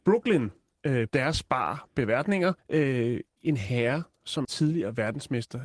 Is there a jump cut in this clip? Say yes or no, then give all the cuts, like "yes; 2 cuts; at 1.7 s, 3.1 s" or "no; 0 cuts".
yes; 3 cuts; at 1.1 s, 2.6 s, 4.4 s